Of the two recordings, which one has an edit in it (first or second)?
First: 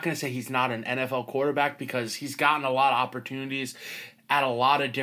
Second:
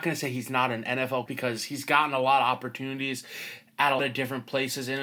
second